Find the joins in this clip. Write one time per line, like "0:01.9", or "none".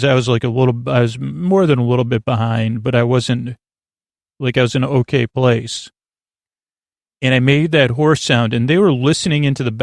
none